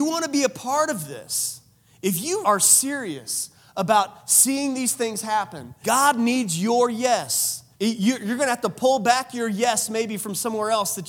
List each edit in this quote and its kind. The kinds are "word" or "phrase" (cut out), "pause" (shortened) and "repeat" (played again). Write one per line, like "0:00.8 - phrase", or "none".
0:02.4 - word
0:05.8 - word
0:07.7 - pause